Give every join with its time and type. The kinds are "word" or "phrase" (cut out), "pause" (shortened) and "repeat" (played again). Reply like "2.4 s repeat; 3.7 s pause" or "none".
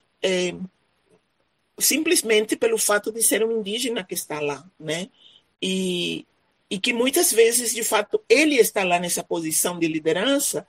none